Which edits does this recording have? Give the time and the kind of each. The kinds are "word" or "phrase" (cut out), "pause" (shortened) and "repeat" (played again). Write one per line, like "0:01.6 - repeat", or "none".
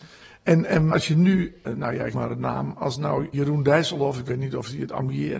0:00.9 - word
0:01.7 - word
0:02.1 - word
0:03.3 - word